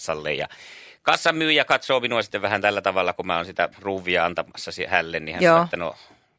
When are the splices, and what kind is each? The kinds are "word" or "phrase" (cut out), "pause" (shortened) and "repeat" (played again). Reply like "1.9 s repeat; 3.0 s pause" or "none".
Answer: 3.7 s pause